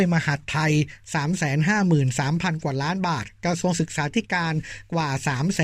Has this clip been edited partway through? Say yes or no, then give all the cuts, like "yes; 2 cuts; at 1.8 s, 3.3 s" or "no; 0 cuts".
no; 0 cuts